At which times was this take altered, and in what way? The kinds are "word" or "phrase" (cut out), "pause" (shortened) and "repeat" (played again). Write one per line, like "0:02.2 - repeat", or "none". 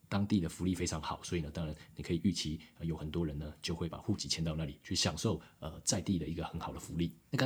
none